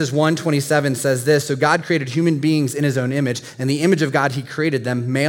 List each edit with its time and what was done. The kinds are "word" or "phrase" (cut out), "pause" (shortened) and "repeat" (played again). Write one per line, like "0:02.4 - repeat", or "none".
none